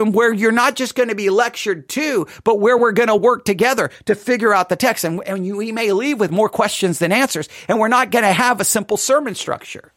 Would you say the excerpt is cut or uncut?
uncut